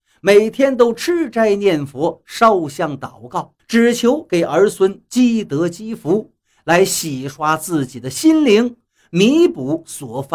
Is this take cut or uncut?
cut